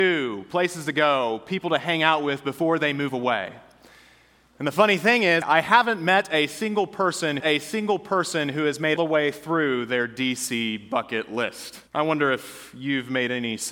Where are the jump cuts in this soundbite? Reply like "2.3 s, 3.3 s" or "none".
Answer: 5.4 s, 7.4 s, 9.0 s, 11.9 s